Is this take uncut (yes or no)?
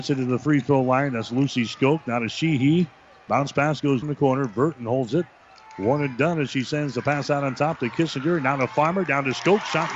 no